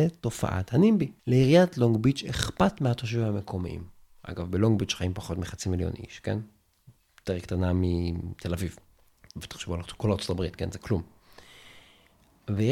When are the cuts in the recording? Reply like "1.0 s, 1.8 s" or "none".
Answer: 1.2 s